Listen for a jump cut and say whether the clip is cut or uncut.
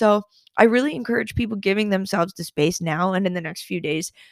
uncut